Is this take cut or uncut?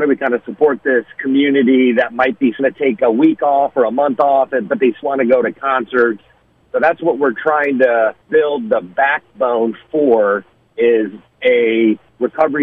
cut